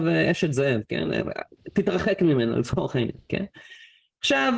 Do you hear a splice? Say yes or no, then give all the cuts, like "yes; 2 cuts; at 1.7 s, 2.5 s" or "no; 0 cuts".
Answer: no; 0 cuts